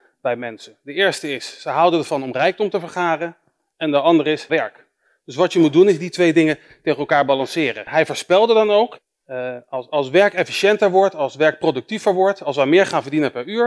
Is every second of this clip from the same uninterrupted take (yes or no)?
no